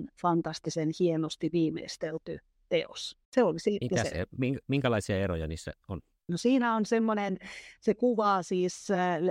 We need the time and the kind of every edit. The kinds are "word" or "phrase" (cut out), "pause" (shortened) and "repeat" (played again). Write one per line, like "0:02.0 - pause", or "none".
0:03.2 - pause

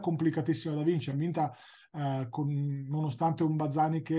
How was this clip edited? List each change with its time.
0:01.1 - word

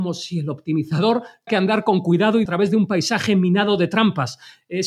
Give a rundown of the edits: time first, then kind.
0:01.5 - word
0:02.5 - phrase

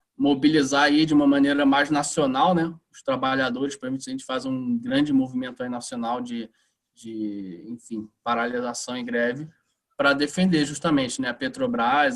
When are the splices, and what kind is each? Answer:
none

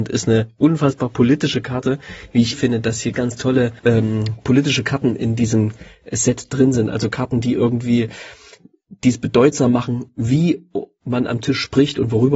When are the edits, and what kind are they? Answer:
0:02.5 - word
0:03.1 - word
0:03.8 - pause

